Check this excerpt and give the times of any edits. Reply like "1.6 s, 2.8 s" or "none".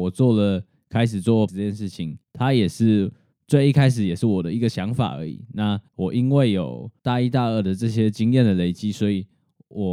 1.5 s, 2.2 s, 3.3 s, 5.9 s, 7.0 s